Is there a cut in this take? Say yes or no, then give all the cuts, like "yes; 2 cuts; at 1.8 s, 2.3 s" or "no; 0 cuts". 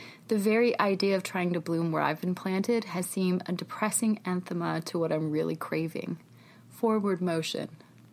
no; 0 cuts